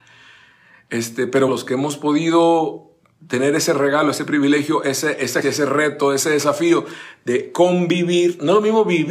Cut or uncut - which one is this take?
cut